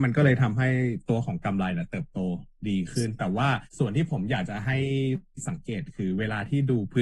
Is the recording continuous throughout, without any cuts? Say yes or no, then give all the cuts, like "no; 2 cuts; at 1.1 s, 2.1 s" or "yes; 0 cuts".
no; 1 cut; at 3.7 s